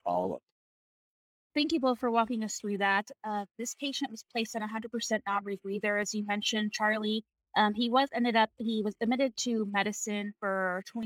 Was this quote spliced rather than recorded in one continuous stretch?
no; 0 cuts

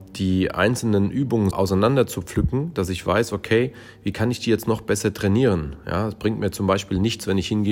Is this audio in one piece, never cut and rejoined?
no; 1 cut; at 1.5 s

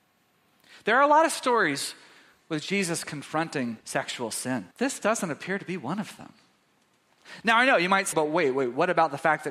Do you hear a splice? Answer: yes; 3 cuts; at 3.8 s, 4.7 s, 8.1 s

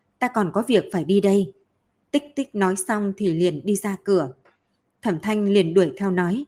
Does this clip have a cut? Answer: no; 0 cuts

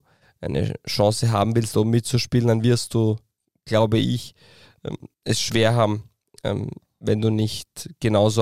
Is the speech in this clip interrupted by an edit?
yes; 1 cut; at 5.1 s

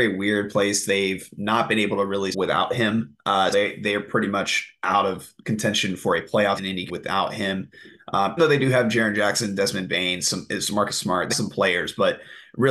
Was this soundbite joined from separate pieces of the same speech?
yes; 6 cuts; at 2.3 s, 3.5 s, 6.6 s, 6.9 s, 8.4 s, 11.3 s

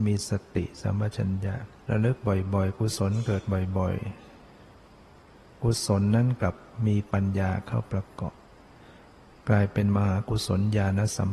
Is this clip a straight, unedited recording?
yes; 0 cuts

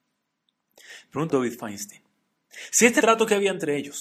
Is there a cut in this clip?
yes; 2 cuts; at 1.3 s, 3.0 s

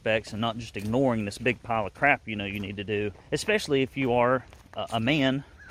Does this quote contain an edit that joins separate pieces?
yes; 1 cut; at 3.2 s

